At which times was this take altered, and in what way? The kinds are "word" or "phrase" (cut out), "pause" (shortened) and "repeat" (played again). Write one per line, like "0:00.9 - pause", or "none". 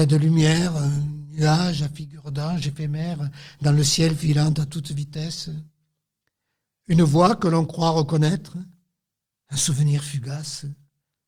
none